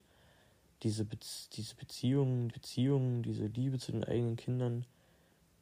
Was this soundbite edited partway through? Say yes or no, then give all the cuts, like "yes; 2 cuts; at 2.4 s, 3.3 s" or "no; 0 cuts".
yes; 1 cut; at 2.5 s